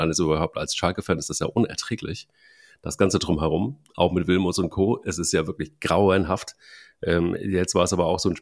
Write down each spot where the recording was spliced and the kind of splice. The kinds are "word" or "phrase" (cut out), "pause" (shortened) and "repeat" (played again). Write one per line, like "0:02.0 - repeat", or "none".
none